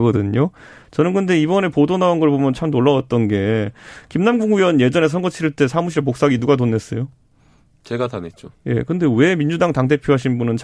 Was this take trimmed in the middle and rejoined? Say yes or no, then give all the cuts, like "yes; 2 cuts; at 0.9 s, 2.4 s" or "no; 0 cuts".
no; 0 cuts